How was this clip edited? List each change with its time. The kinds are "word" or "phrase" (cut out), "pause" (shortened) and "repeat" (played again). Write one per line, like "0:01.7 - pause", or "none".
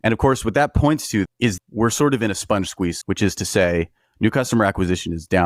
0:01.3 - word
0:01.6 - word
0:03.0 - word